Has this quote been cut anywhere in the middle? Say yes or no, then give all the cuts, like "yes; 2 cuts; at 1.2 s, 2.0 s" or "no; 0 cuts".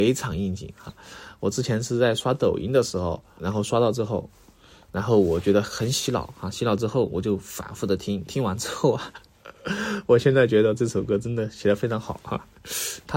yes; 1 cut; at 3.4 s